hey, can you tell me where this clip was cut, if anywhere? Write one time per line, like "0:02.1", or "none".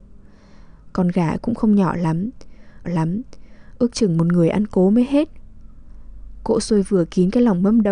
0:02.8